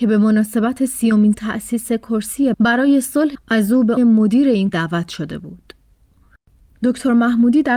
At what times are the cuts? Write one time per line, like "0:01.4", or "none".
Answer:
0:01.3
0:02.5
0:03.3
0:04.0
0:04.7